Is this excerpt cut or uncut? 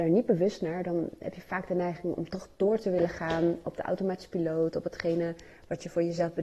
uncut